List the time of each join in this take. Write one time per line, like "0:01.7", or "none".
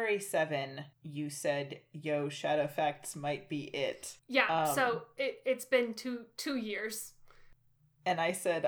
0:00.9
0:04.2